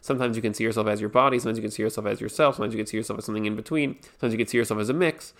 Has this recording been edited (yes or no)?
yes